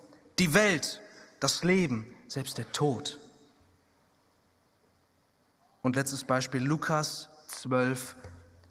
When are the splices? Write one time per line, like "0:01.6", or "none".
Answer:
none